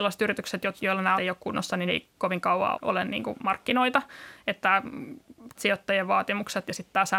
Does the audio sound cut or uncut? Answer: cut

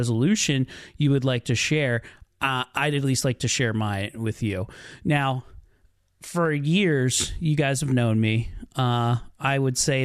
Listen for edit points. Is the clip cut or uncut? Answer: uncut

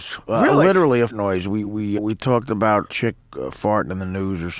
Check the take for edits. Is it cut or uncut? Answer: cut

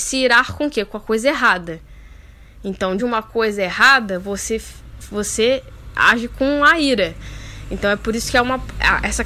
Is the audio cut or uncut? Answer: cut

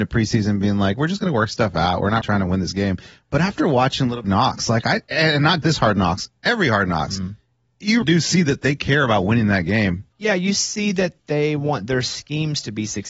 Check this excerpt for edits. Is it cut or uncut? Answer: cut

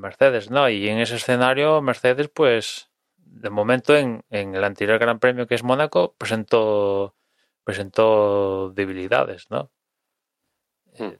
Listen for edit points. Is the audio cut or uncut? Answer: uncut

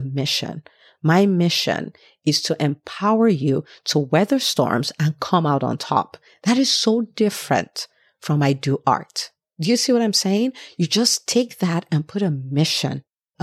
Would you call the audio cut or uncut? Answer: uncut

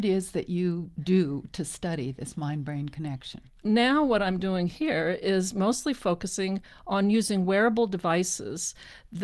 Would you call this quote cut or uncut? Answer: uncut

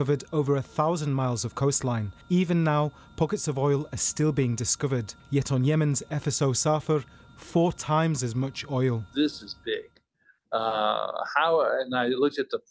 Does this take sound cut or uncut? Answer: cut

